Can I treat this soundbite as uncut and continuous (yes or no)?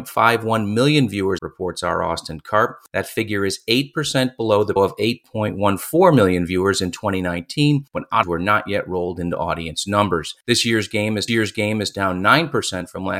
no